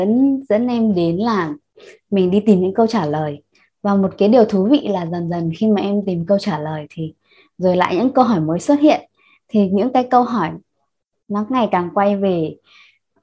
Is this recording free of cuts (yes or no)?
yes